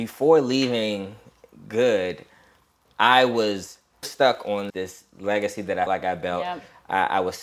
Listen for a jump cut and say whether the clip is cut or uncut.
cut